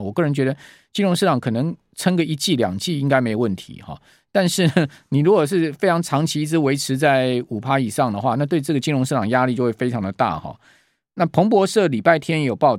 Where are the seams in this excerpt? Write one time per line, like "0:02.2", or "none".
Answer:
none